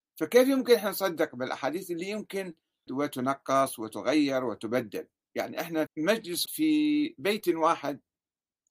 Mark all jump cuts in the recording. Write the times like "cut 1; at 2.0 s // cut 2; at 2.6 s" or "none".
cut 1; at 2.9 s // cut 2; at 5.9 s // cut 3; at 6.5 s